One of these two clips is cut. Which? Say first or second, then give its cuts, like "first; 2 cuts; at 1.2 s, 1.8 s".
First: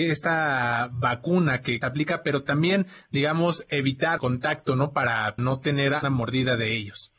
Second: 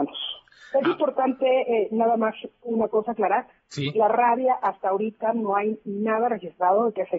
first; 4 cuts; at 1.8 s, 4.2 s, 5.4 s, 6.0 s